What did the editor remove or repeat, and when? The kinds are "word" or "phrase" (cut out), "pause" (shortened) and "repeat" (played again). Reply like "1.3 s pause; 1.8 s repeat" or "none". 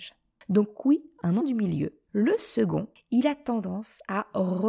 1.4 s word; 2.1 s pause